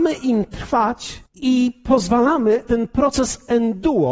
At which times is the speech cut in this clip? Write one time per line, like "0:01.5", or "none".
0:01.3
0:02.6